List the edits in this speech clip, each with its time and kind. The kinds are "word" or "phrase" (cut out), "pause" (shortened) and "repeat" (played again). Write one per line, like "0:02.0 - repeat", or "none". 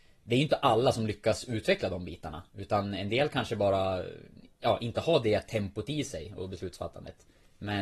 none